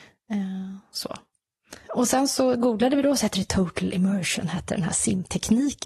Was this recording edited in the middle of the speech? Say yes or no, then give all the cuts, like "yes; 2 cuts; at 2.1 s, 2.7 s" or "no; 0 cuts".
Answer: yes; 1 cut; at 1.8 s